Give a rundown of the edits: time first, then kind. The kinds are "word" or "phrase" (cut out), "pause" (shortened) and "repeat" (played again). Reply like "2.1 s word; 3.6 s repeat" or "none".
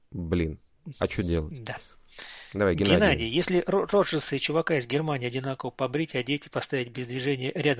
none